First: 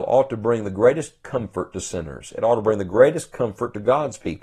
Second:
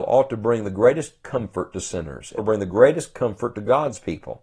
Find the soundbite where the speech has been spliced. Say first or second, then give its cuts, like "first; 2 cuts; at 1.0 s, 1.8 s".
second; 1 cut; at 2.4 s